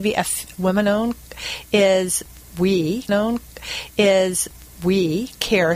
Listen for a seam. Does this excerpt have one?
yes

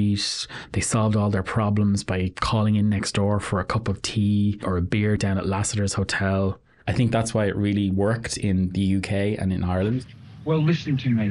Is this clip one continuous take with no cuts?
yes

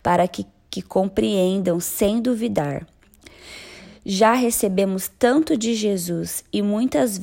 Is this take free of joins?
yes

